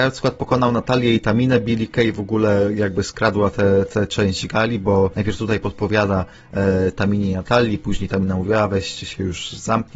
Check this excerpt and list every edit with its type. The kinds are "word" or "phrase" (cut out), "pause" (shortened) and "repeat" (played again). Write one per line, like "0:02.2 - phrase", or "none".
none